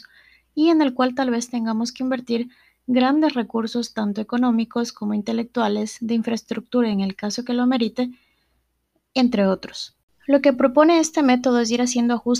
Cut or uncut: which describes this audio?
uncut